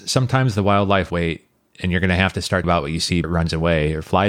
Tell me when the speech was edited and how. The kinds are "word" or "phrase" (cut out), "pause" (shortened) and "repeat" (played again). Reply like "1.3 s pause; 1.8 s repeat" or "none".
1.1 s word; 2.6 s word; 3.2 s word

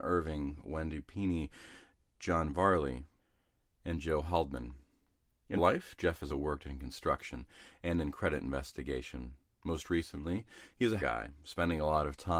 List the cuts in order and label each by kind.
5.6 s word; 6.3 s word; 11.0 s phrase

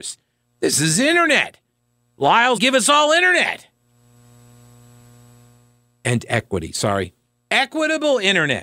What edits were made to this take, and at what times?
2.6 s phrase

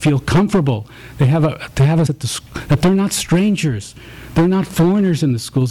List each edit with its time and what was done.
2.1 s word

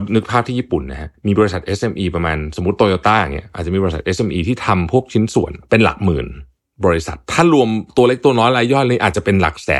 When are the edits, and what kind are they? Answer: none

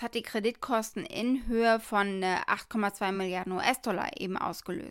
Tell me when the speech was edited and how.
none

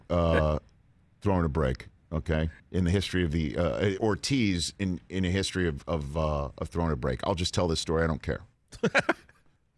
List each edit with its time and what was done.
2.6 s pause; 4.0 s word

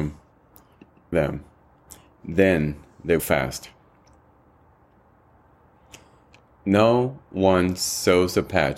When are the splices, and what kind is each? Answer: 1.1 s phrase; 3.2 s word

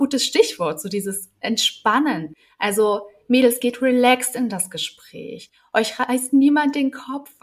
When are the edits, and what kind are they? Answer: none

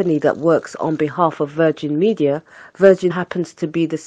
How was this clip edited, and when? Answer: 3.1 s word

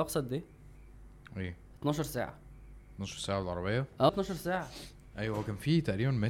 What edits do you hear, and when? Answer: 4.1 s word

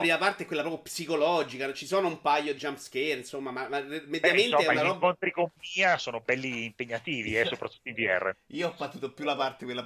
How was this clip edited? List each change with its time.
2.6 s word; 6.0 s word

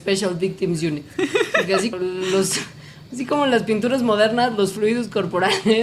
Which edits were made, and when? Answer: 1.9 s word

